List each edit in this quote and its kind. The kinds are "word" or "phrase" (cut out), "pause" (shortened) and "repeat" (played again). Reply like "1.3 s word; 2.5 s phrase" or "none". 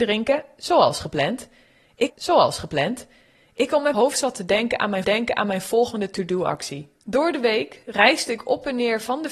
2.1 s repeat; 3.9 s word; 5.0 s repeat; 7.0 s pause